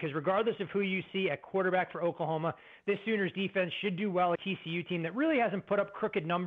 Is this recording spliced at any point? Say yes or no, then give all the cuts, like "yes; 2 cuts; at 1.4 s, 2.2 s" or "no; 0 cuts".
yes; 1 cut; at 4.3 s